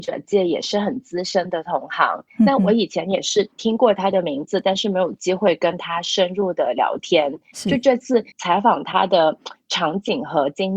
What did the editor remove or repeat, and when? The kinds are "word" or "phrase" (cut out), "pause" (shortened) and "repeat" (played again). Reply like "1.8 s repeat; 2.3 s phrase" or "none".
8.3 s pause

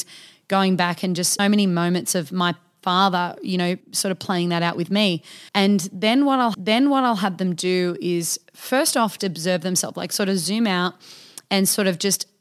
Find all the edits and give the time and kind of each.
1.4 s word; 3.8 s pause; 5.5 s pause; 6.5 s repeat; 9.2 s word

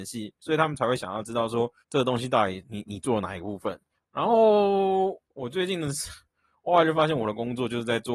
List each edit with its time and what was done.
1.8 s pause; 4.0 s pause; 5.3 s pause

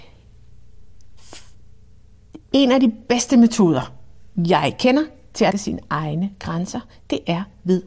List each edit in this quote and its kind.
2.4 s pause; 5.5 s phrase

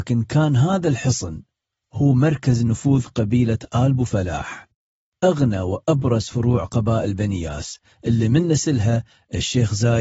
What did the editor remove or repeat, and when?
none

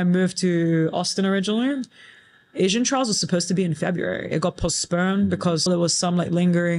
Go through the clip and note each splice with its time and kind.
5.7 s word

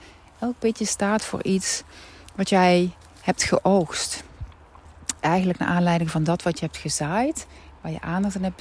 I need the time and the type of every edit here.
5.2 s pause

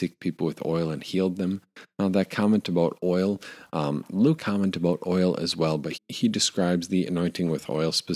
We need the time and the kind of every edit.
4.4 s phrase; 5.9 s word

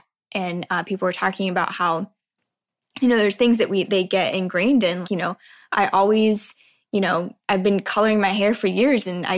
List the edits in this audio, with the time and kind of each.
5.0 s word

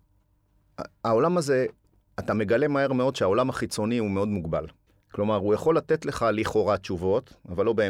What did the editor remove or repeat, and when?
1.8 s pause; 4.9 s pause

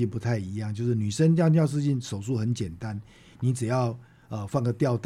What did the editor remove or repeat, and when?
none

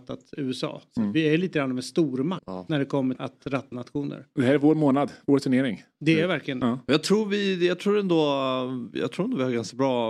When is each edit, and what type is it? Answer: 2.4 s word; 3.2 s word; 3.7 s word

